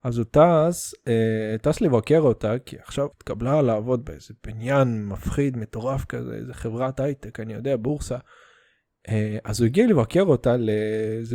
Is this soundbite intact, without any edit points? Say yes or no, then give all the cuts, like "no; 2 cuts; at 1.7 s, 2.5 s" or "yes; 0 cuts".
no; 1 cut; at 3.1 s